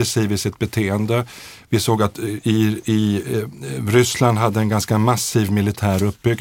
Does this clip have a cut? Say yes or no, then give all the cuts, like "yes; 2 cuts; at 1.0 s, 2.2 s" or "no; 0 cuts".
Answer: no; 0 cuts